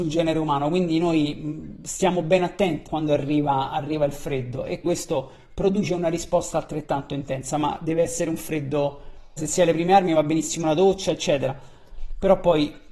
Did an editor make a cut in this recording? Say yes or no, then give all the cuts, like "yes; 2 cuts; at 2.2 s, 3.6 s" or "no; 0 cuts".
yes; 3 cuts; at 2.9 s, 4.8 s, 9.4 s